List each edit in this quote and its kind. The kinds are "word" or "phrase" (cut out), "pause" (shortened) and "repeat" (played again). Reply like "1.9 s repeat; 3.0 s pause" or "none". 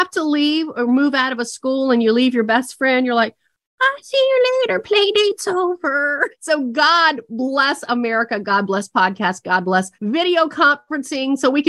6.3 s pause; 9.9 s pause